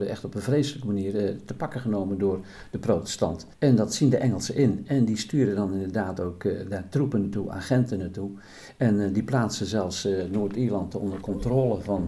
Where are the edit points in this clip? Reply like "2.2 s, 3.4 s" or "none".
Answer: 3.5 s